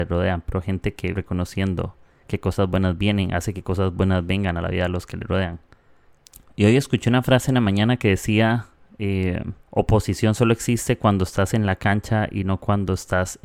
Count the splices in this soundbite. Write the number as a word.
three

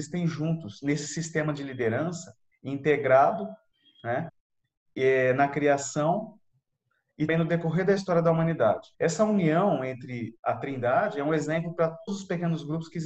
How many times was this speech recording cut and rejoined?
four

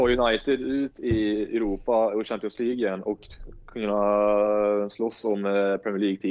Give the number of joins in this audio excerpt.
zero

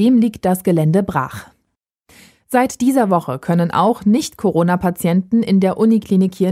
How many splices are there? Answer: zero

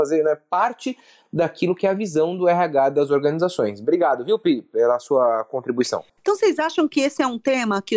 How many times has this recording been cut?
zero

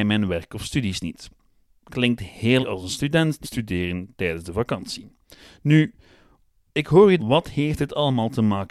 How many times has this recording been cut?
three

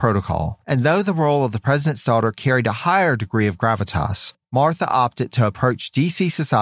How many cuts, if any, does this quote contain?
zero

